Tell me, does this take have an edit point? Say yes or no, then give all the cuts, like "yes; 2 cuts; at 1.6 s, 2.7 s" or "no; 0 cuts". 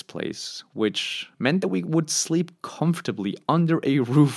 no; 0 cuts